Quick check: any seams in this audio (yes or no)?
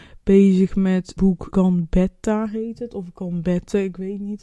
yes